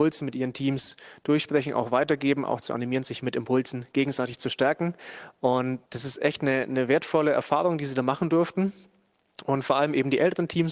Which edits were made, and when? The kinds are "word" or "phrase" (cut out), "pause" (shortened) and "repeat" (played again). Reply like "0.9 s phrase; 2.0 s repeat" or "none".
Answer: 5.9 s pause